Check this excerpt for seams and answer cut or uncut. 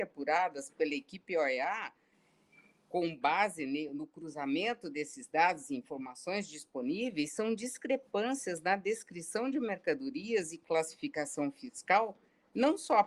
uncut